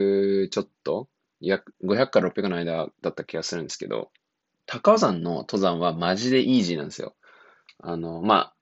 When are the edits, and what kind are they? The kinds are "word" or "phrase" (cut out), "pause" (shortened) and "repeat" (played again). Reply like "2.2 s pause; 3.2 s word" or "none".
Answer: 2.9 s pause; 4.5 s pause